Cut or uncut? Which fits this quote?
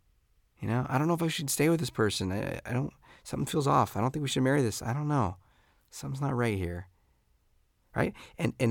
uncut